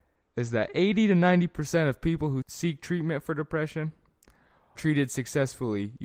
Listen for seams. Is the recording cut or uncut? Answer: cut